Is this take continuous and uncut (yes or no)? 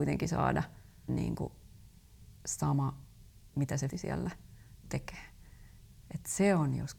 no